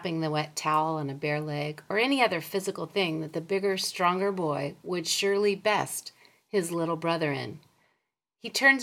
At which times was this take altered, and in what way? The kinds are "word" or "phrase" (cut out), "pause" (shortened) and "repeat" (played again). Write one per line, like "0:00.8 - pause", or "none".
none

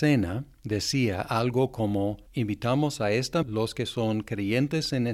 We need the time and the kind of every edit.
0:03.4 - word

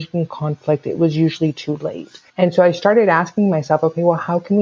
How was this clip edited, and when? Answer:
0:02.3 - pause

